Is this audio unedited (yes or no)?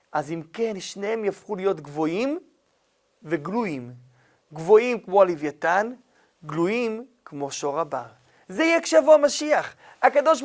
yes